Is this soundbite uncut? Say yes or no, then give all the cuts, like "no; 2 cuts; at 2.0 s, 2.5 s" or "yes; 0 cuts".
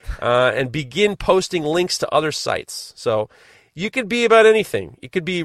yes; 0 cuts